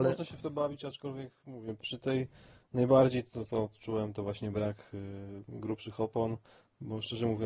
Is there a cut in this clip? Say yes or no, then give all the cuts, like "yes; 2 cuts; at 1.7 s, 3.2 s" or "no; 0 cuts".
no; 0 cuts